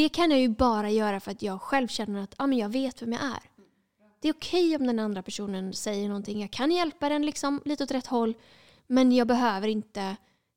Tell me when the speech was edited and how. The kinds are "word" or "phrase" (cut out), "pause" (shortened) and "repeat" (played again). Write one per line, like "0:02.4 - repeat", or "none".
none